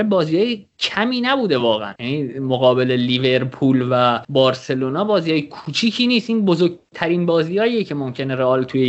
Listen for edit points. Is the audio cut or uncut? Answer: uncut